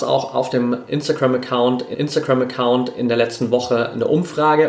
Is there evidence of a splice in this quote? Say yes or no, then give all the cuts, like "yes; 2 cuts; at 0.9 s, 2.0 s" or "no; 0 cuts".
yes; 1 cut; at 1.9 s